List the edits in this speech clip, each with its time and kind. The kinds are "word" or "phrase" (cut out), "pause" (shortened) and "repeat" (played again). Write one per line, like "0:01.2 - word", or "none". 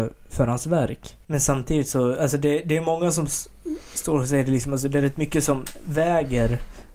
0:01.2 - pause